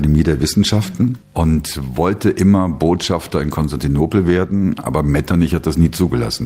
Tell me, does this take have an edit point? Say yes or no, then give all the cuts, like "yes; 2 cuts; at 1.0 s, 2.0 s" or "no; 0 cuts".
no; 0 cuts